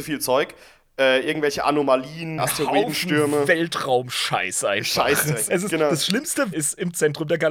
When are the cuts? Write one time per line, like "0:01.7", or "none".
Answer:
0:02.4
0:05.5
0:06.5

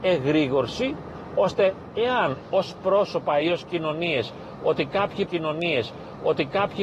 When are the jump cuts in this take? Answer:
0:02.4
0:05.3

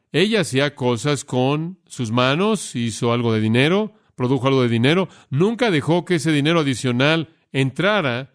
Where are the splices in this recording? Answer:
none

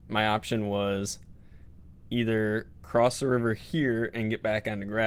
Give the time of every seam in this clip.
none

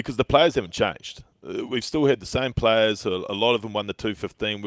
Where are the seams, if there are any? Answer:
none

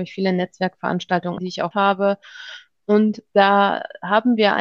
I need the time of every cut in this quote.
0:01.4
0:01.7

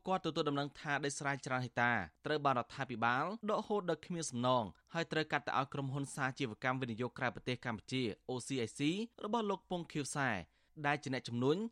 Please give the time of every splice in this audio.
0:02.2
0:03.4
0:04.8
0:09.1

